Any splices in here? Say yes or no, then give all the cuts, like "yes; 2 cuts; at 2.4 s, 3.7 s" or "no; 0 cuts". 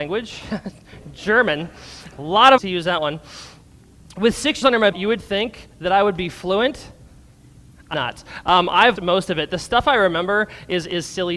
yes; 6 cuts; at 2.1 s, 2.6 s, 4.6 s, 4.9 s, 7.9 s, 9.0 s